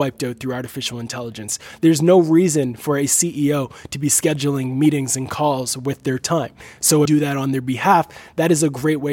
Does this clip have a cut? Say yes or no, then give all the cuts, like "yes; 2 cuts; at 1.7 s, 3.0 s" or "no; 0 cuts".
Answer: yes; 1 cut; at 7.1 s